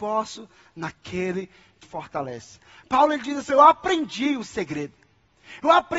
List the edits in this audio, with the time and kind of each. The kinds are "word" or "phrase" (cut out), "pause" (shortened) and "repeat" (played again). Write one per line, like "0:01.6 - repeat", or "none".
0:01.8 - word
0:03.5 - word